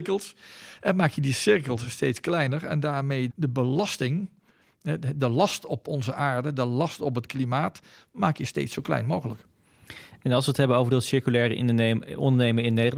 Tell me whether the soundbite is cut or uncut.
cut